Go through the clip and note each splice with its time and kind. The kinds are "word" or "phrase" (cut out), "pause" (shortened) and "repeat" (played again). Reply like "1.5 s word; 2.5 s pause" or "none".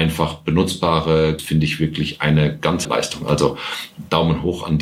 1.4 s phrase; 2.8 s word